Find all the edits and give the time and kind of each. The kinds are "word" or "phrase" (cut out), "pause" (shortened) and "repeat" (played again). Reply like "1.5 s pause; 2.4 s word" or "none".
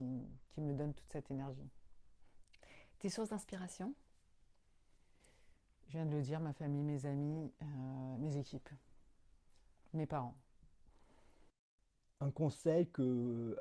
none